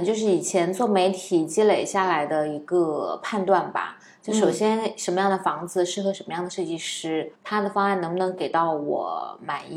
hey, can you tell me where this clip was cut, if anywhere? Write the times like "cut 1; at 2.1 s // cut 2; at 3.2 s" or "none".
cut 1; at 7.3 s